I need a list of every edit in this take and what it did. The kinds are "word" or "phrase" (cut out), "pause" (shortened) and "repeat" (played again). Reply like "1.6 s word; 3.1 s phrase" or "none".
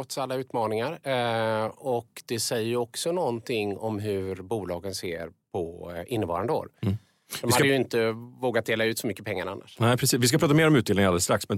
none